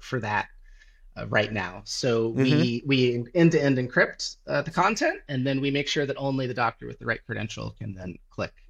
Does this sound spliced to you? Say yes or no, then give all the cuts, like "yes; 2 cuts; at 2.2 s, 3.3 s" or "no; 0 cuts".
no; 0 cuts